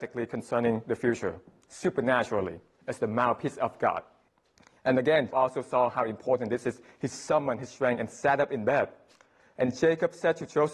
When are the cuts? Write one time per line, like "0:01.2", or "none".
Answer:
0:04.3
0:05.3